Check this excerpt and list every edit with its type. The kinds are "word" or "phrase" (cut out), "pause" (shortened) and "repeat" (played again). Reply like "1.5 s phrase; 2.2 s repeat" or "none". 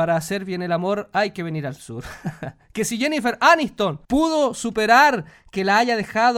4.0 s pause